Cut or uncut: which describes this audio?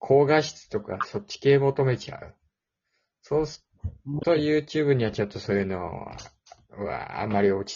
uncut